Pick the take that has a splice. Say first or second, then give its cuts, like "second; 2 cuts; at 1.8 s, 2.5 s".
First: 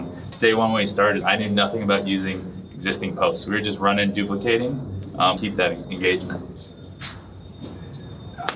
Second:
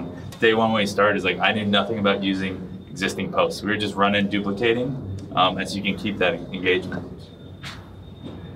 first; 2 cuts; at 1.2 s, 5.4 s